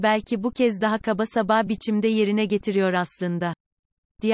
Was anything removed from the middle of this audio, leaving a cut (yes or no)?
no